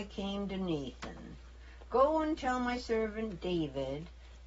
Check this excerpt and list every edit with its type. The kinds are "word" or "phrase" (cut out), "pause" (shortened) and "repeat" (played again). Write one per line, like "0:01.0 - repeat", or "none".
none